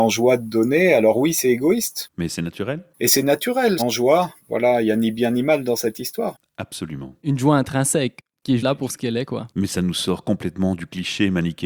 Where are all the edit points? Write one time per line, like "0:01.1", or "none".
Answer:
0:03.8
0:04.4
0:08.6